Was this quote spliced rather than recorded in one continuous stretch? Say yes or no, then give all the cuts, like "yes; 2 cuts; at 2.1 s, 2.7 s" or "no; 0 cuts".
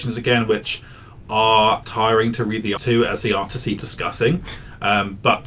yes; 3 cuts; at 1.8 s, 2.8 s, 3.8 s